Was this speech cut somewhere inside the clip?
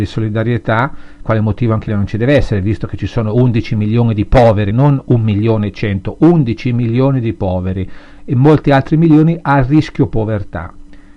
yes; 3 cuts; at 1.2 s, 1.9 s, 4.7 s

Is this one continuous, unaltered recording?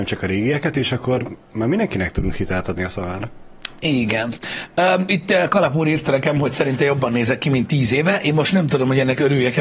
yes; 0 cuts

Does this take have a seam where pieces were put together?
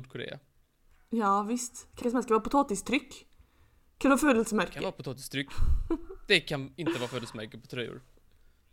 yes; 1 cut; at 2.0 s

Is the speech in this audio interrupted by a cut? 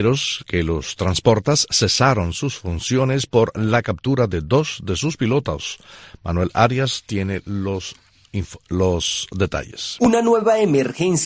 no; 0 cuts

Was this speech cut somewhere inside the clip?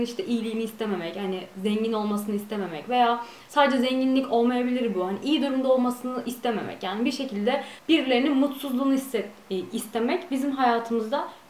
yes; 1 cut; at 7.8 s

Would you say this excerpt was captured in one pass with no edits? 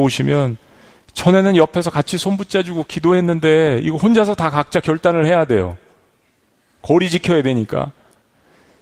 yes; 0 cuts

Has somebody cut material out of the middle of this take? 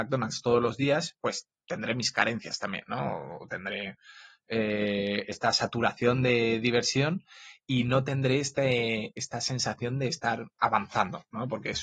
yes; 1 cut; at 10.5 s

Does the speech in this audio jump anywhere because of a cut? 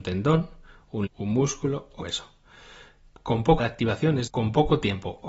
yes; 4 cuts; at 1.1 s, 2.0 s, 3.6 s, 4.3 s

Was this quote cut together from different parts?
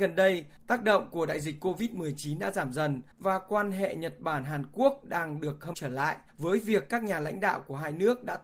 yes; 2 cuts; at 3.1 s, 5.7 s

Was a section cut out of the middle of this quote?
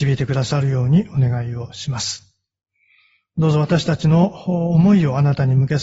no; 0 cuts

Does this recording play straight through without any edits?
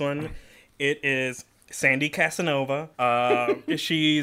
no; 1 cut; at 2.9 s

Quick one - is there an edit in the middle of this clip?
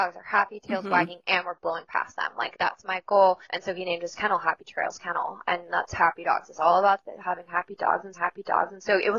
yes; 4 cuts; at 2.5 s, 3.4 s, 5.9 s, 8.1 s

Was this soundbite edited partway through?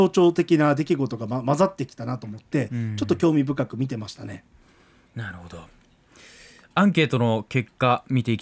no; 0 cuts

